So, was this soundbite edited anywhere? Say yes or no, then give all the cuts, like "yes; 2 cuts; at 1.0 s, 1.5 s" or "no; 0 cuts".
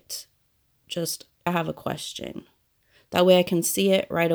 yes; 1 cut; at 1.5 s